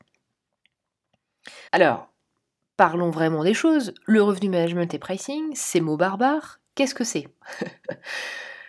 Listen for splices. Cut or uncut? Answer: cut